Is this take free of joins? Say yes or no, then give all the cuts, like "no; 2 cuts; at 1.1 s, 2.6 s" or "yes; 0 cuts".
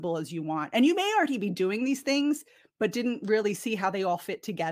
yes; 0 cuts